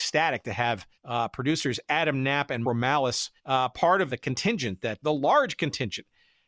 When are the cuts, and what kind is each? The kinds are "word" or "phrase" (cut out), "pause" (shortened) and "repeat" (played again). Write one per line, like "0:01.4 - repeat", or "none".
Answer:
0:00.9 - pause
0:02.6 - word
0:03.4 - pause
0:04.1 - word
0:05.0 - word